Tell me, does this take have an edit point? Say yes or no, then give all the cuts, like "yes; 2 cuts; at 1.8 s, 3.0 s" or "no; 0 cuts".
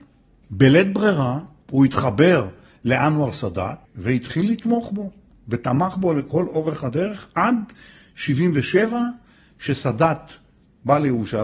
no; 0 cuts